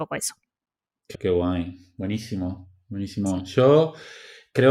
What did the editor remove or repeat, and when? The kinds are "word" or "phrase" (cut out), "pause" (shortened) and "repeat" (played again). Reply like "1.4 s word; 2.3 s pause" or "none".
1.1 s word